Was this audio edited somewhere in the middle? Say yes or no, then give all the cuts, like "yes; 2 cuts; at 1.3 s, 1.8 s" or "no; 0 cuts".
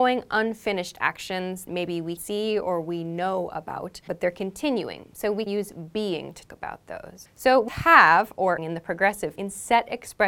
yes; 8 cuts; at 1.7 s, 2.2 s, 4.1 s, 5.5 s, 6.5 s, 7.7 s, 8.6 s, 9.4 s